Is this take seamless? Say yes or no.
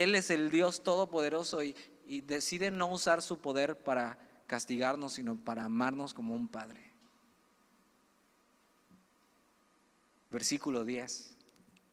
yes